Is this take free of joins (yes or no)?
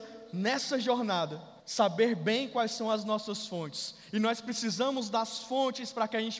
no